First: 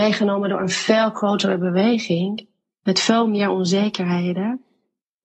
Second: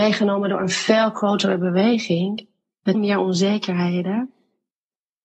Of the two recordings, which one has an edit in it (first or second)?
second